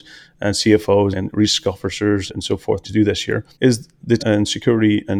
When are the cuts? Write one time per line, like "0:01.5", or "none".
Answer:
0:01.1
0:02.3
0:02.8
0:03.5
0:04.2